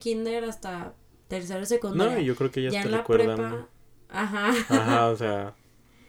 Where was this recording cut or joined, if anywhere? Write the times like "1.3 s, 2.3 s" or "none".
none